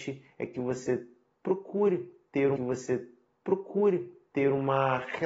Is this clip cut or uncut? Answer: cut